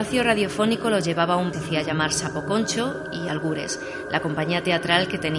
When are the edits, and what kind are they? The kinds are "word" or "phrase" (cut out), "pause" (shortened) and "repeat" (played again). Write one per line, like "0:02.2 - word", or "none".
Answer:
0:01.5 - phrase